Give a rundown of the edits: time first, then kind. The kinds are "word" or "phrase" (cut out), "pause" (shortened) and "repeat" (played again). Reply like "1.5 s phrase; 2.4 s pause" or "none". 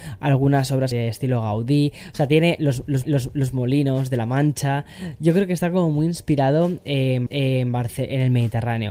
0.9 s phrase; 3.0 s repeat; 7.3 s repeat